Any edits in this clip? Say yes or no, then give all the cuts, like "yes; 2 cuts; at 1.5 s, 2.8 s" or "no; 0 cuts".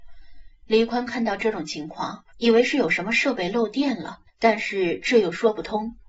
yes; 2 cuts; at 2.3 s, 4.3 s